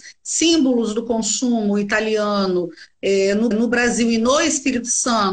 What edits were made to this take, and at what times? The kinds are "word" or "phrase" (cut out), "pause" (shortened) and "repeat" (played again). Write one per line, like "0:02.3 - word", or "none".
0:03.5 - repeat